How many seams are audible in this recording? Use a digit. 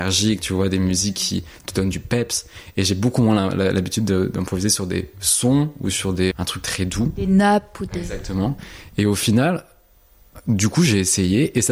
1